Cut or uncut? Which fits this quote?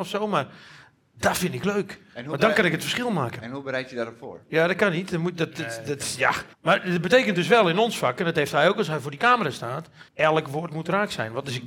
cut